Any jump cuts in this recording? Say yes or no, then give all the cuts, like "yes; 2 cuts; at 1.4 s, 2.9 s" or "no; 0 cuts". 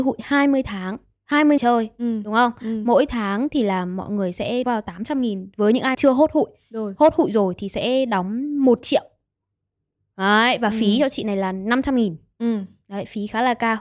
yes; 3 cuts; at 1.6 s, 4.6 s, 5.9 s